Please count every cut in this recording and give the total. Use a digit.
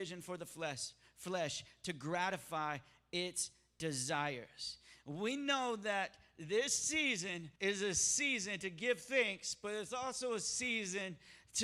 1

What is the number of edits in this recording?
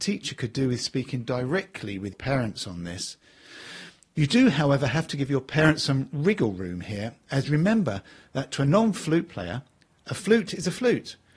1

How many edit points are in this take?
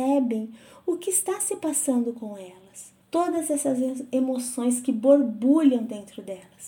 1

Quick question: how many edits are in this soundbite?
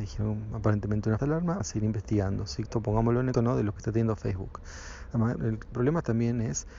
7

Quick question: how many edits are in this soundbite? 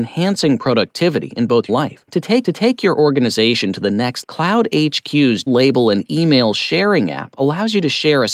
5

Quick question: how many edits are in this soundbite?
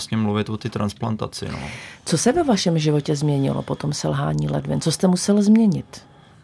0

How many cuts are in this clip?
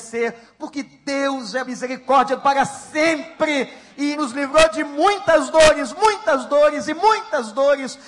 3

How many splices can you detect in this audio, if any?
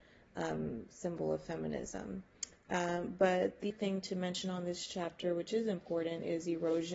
1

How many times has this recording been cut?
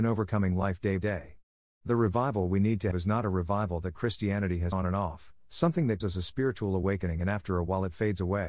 4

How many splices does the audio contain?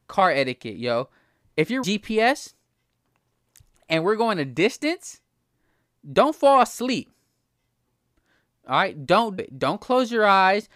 2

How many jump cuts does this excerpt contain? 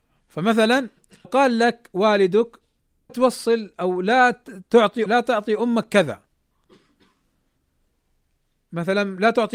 3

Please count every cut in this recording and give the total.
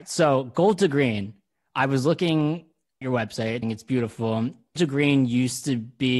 3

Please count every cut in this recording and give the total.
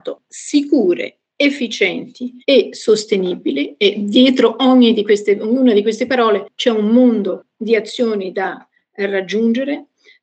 1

